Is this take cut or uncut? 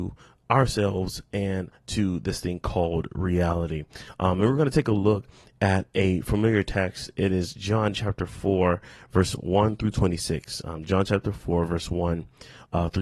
uncut